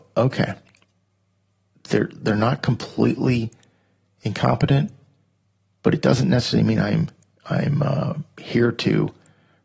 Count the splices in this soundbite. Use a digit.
0